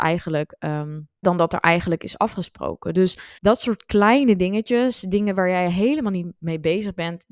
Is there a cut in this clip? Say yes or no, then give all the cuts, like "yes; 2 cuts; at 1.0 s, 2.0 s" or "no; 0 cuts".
yes; 2 cuts; at 1.2 s, 3.4 s